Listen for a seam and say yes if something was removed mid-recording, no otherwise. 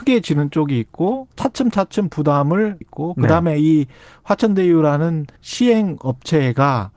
yes